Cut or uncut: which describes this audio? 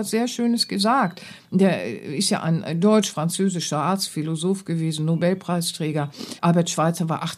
cut